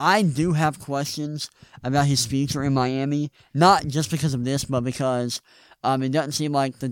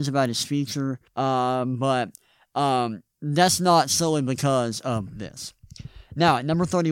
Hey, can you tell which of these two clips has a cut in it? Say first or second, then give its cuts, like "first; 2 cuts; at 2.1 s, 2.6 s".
second; 2 cuts; at 1.1 s, 3.1 s